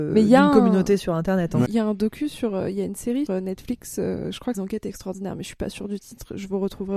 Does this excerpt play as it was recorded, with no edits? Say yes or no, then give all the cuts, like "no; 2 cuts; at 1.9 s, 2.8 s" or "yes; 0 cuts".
no; 3 cuts; at 1.7 s, 3.3 s, 4.5 s